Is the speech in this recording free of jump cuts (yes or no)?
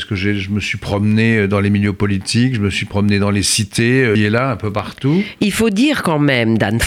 no